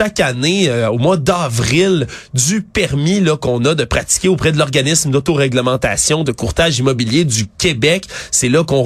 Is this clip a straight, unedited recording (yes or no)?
yes